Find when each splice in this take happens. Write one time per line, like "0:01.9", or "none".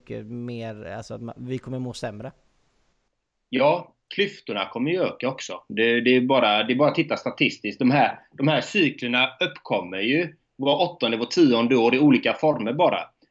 0:04.0